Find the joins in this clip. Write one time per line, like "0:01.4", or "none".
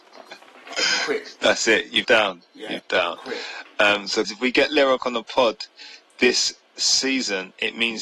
0:02.0
0:02.8
0:04.2
0:05.0